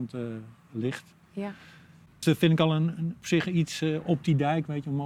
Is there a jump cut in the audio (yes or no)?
no